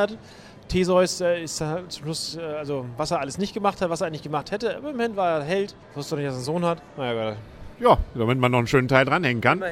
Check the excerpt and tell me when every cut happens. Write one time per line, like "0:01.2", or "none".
0:05.8
0:06.9